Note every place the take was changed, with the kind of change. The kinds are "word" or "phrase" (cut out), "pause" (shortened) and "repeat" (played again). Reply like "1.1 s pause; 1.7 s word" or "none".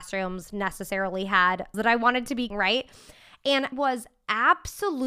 1.7 s word; 2.5 s word; 3.7 s word